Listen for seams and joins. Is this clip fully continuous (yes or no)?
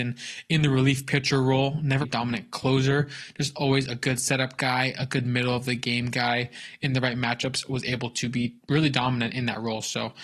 no